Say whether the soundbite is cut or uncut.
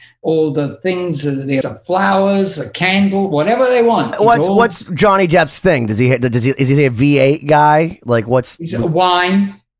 cut